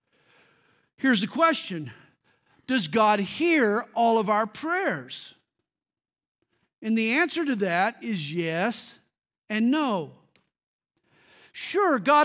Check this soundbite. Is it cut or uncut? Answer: uncut